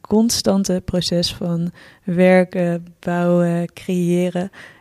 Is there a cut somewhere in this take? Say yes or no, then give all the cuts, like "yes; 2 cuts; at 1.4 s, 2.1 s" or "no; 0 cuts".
no; 0 cuts